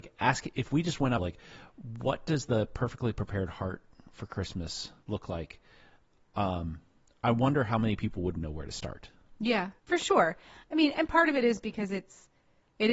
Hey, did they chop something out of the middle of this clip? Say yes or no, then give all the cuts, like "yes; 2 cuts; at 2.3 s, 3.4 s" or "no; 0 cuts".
yes; 4 cuts; at 1.2 s, 5.0 s, 8.4 s, 9.8 s